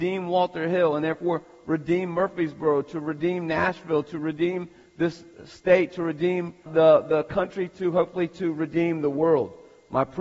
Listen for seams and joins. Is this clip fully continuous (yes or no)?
no